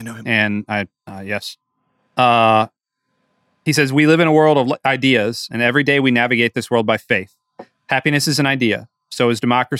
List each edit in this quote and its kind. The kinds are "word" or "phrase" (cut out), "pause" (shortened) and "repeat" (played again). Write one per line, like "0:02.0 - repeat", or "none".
none